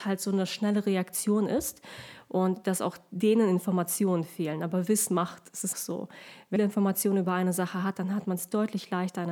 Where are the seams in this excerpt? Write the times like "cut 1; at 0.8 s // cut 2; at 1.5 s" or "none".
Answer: cut 1; at 5.1 s // cut 2; at 5.7 s // cut 3; at 6.6 s